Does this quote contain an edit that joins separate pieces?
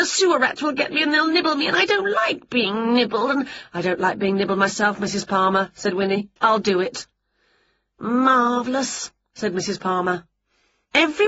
yes; 1 cut; at 6.4 s

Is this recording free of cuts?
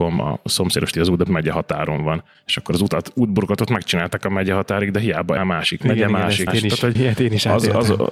no; 5 cuts; at 0.9 s, 1.3 s, 5.4 s, 6.5 s, 7.0 s

